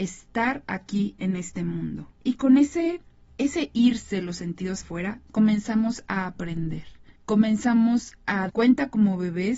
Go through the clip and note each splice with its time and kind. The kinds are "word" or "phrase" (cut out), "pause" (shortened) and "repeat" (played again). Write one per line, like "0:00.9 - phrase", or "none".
0:02.1 - pause
0:03.3 - pause
0:04.8 - word
0:07.2 - pause
0:08.5 - word